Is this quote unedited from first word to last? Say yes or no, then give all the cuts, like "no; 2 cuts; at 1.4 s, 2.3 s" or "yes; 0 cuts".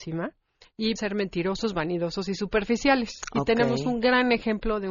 no; 1 cut; at 1.0 s